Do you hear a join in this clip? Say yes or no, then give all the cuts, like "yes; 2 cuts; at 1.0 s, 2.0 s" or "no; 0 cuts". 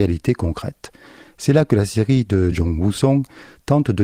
no; 0 cuts